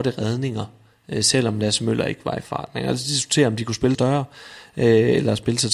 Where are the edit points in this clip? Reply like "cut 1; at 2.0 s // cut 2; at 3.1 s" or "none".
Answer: cut 1; at 3.9 s